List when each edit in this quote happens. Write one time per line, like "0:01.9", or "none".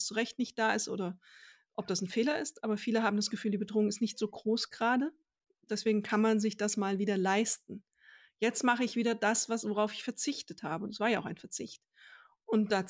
none